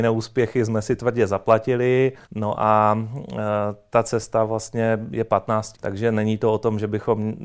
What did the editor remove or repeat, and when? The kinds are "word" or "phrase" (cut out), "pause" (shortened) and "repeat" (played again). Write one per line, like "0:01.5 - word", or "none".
0:02.2 - pause
0:05.7 - word